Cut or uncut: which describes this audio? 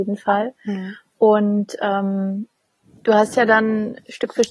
uncut